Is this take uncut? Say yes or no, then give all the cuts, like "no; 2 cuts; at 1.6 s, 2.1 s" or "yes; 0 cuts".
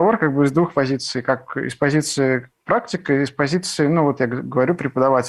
yes; 0 cuts